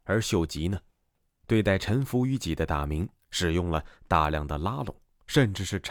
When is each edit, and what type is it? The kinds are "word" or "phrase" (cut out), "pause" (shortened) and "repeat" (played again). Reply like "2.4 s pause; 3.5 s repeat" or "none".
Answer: none